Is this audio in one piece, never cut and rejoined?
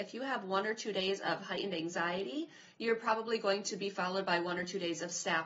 yes; 0 cuts

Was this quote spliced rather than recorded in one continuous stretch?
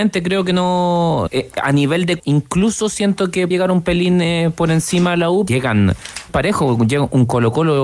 yes; 5 cuts; at 1.3 s, 2.2 s, 3.5 s, 5.5 s, 6.3 s

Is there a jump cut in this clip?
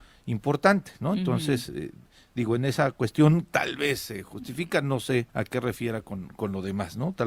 yes; 1 cut; at 5.3 s

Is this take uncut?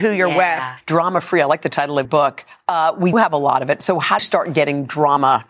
no; 3 cuts; at 2.0 s, 3.1 s, 4.2 s

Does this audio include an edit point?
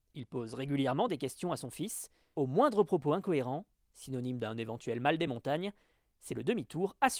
no; 0 cuts

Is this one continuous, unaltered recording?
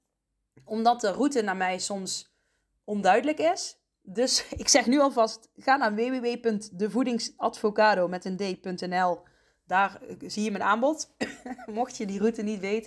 yes; 0 cuts

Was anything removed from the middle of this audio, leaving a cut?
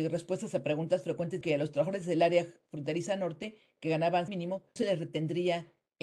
yes; 3 cuts; at 1.4 s, 4.3 s, 4.8 s

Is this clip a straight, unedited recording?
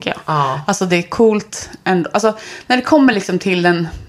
yes; 0 cuts

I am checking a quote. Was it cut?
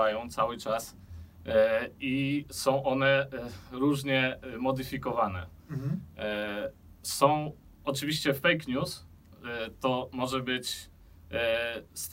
no; 0 cuts

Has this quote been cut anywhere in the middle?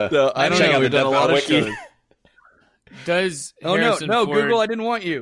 no; 0 cuts

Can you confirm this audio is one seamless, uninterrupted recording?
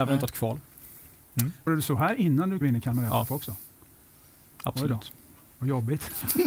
no; 2 cuts; at 1.7 s, 2.6 s

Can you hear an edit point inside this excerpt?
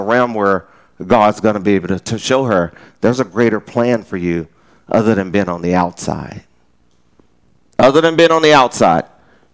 no; 0 cuts

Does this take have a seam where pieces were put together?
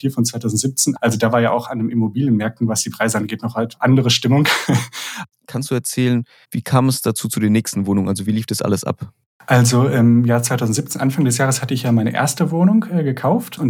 no; 0 cuts

